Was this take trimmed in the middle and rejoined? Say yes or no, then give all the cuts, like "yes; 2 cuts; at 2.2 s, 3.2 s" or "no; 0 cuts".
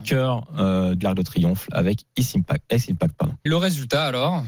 yes; 2 cuts; at 1.0 s, 3.5 s